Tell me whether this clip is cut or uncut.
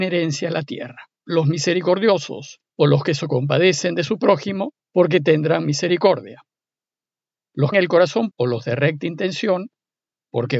cut